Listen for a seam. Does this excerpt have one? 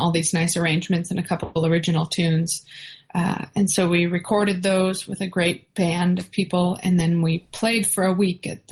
no; 0 cuts

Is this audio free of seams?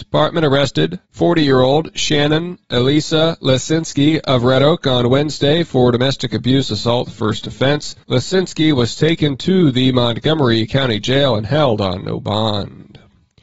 no; 2 cuts; at 1.0 s, 8.0 s

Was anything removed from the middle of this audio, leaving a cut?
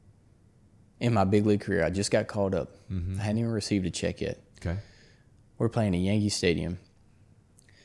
no; 0 cuts

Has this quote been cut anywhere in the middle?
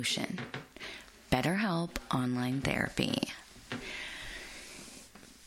no; 0 cuts

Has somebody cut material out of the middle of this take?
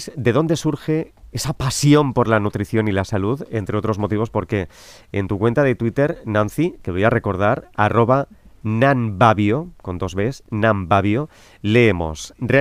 no; 0 cuts

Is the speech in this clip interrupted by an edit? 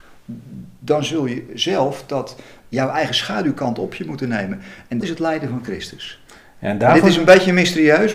yes; 1 cut; at 5.0 s

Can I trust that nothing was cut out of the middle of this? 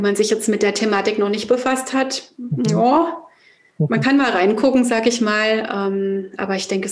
yes; 0 cuts

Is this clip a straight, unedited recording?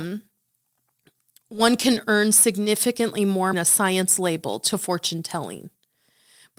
no; 1 cut; at 3.5 s

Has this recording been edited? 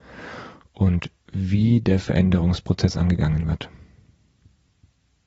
yes; 1 cut; at 1.2 s

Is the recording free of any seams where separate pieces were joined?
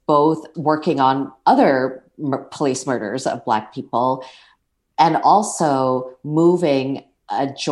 yes; 0 cuts

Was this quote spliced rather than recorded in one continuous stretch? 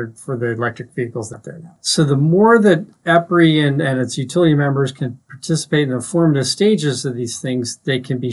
yes; 1 cut; at 1.3 s

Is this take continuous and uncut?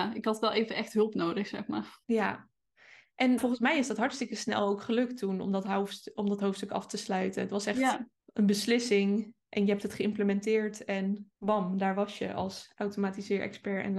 no; 4 cuts; at 2.0 s, 3.4 s, 8.2 s, 11.3 s

